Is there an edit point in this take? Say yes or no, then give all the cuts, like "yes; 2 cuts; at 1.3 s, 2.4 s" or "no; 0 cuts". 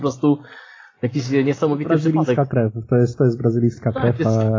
no; 0 cuts